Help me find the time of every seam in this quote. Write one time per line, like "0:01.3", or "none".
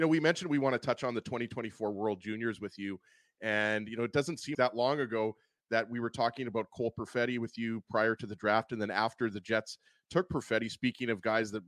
0:04.5

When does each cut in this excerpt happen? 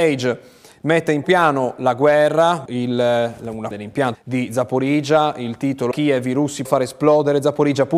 0:01.2
0:02.7
0:03.7
0:04.1
0:05.9
0:06.6

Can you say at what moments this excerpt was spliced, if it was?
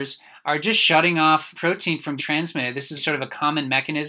0:01.5
0:02.2
0:03.0

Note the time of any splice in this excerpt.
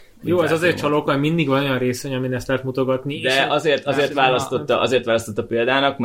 none

